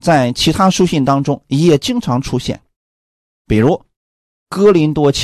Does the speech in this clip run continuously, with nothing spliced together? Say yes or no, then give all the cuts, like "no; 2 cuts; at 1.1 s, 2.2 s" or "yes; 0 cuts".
yes; 0 cuts